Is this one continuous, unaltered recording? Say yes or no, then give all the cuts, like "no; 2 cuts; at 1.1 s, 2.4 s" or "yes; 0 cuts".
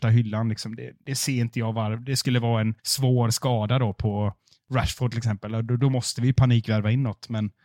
no; 2 cuts; at 1.0 s, 2.8 s